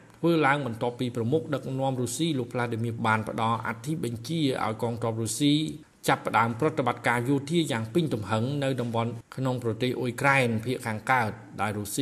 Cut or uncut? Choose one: cut